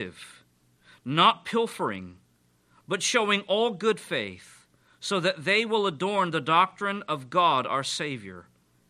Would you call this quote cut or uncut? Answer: uncut